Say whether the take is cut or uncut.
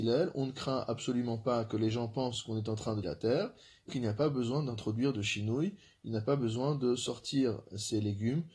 cut